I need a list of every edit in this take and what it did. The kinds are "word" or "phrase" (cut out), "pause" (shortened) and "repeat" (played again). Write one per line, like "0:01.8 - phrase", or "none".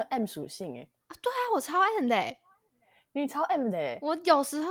none